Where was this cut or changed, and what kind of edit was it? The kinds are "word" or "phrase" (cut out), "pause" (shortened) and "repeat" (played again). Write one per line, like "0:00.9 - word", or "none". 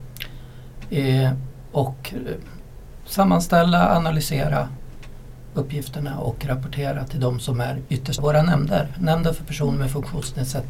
0:08.2 - word